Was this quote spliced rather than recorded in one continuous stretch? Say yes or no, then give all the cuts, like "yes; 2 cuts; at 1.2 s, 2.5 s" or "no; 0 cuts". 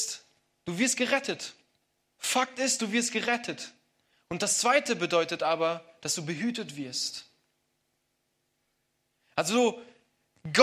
no; 0 cuts